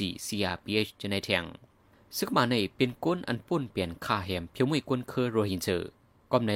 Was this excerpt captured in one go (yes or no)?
yes